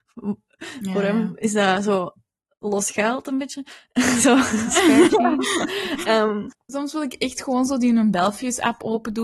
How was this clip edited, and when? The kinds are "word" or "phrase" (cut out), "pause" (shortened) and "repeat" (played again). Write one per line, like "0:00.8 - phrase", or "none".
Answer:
none